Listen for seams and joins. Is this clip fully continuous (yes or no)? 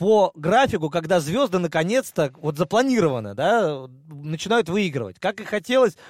yes